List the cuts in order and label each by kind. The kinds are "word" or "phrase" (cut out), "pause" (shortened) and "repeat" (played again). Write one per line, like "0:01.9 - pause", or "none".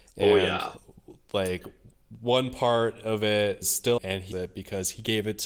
0:03.6 - word
0:04.0 - phrase
0:04.3 - word